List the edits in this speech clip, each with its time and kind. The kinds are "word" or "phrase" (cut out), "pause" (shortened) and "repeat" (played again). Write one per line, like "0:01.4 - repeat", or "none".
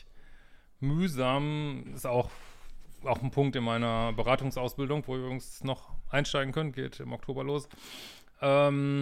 none